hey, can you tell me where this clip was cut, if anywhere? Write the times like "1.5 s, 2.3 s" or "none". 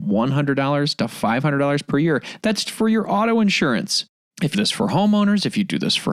2.7 s, 4.5 s